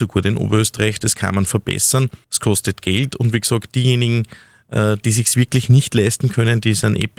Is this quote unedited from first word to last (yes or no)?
no